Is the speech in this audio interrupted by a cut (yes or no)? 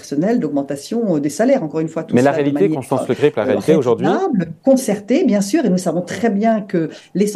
no